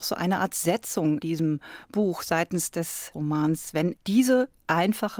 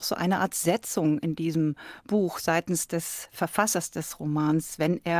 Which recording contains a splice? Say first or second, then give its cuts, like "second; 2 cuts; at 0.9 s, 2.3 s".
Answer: first; 3 cuts; at 1.2 s, 3.1 s, 4.0 s